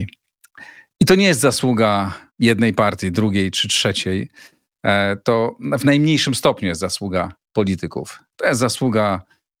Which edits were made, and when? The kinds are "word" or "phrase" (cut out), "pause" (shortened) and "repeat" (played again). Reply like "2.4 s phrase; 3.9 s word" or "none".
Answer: 2.3 s pause